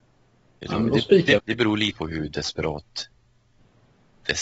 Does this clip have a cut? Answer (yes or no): yes